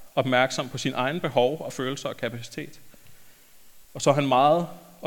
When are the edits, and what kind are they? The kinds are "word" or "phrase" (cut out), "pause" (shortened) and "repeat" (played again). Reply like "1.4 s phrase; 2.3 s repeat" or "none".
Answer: 3.8 s pause